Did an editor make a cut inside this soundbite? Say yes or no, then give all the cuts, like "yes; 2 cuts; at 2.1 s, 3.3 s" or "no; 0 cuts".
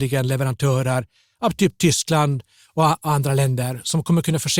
no; 0 cuts